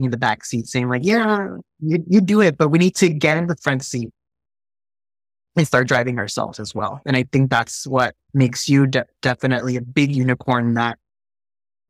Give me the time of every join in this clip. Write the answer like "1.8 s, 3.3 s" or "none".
none

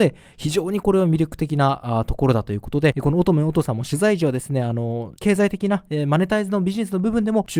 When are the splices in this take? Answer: 5.2 s

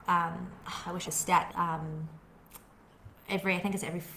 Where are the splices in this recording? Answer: 1.0 s, 1.5 s

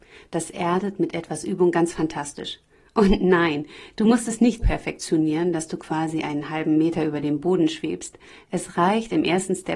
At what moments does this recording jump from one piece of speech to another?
4.6 s

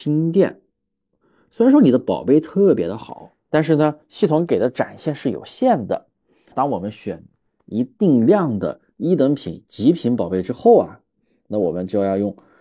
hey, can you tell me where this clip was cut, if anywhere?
3.4 s, 6.5 s

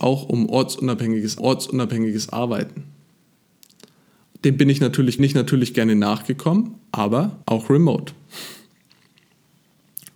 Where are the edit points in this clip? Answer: 1.4 s, 5.2 s, 7.4 s

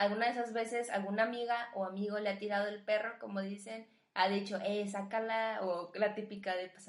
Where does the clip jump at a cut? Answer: none

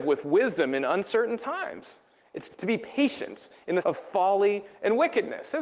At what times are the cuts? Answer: 2.5 s, 3.8 s

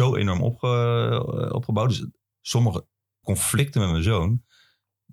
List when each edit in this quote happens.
2.3 s, 3.2 s

